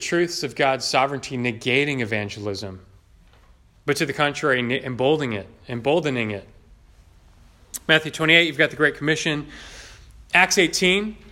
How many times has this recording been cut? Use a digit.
0